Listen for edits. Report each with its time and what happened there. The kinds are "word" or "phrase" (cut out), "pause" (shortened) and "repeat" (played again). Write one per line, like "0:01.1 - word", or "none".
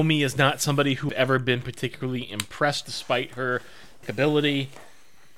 0:01.1 - word
0:02.8 - word
0:04.0 - word